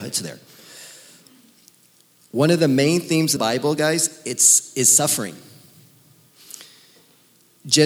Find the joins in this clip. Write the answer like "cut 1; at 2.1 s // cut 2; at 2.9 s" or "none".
cut 1; at 3.4 s